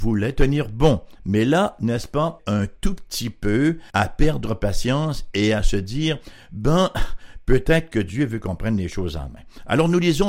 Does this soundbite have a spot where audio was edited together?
yes; 2 cuts; at 2.4 s, 3.9 s

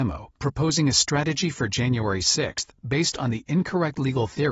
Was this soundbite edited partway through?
no; 0 cuts

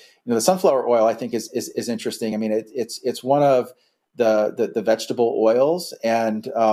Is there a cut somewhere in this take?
no; 0 cuts

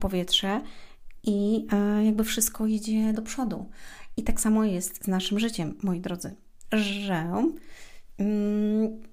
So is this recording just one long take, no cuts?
no; 1 cut; at 3.2 s

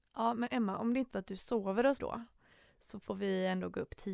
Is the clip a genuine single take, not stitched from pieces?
no; 2 cuts; at 1.1 s, 2.0 s

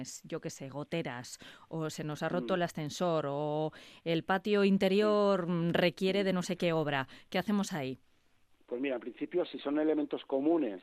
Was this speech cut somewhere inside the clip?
no; 0 cuts

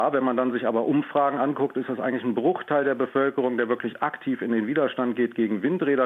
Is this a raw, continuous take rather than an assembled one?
yes; 0 cuts

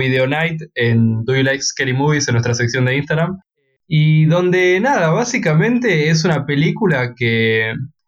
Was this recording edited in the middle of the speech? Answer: no; 0 cuts

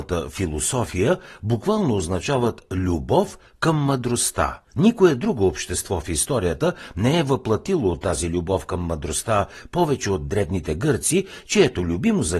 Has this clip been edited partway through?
yes; 1 cut; at 4.6 s

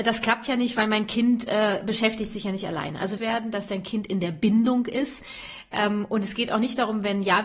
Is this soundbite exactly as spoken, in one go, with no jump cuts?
no; 1 cut; at 3.2 s

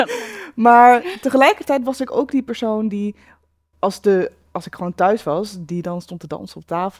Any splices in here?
no; 0 cuts

